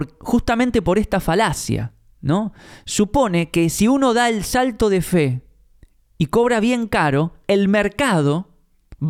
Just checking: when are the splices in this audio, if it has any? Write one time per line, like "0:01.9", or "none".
none